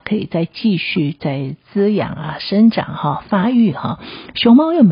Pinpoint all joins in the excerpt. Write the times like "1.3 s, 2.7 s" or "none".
none